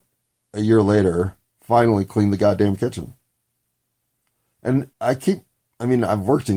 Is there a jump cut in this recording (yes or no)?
yes